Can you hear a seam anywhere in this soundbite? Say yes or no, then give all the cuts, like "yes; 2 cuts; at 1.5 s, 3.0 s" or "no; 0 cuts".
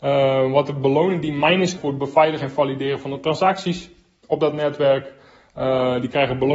yes; 1 cut; at 1.8 s